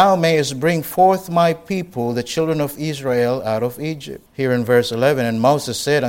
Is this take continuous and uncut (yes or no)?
no